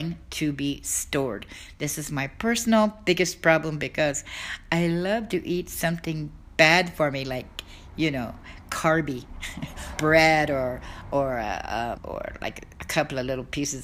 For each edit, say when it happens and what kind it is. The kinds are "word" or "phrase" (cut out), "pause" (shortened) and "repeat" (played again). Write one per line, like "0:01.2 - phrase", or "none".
0:10.0 - word
0:12.0 - word